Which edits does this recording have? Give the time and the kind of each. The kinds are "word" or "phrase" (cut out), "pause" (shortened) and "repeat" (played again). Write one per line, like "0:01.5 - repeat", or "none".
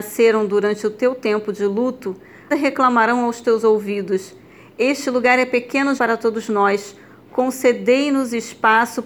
0:02.5 - word
0:06.0 - word